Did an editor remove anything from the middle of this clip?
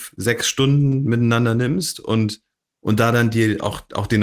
no; 0 cuts

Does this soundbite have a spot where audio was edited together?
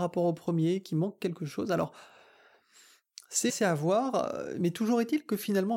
yes; 1 cut; at 3.5 s

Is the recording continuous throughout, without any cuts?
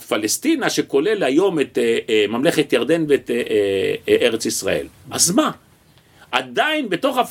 yes; 0 cuts

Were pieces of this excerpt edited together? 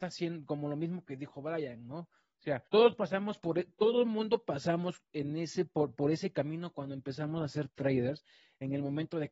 yes; 1 cut; at 2.7 s

